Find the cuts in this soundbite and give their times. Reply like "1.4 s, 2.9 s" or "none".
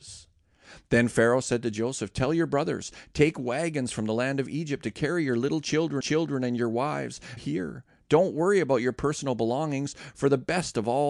6.0 s, 7.4 s